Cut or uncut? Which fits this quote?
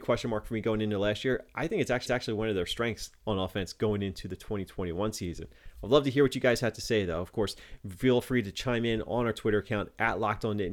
cut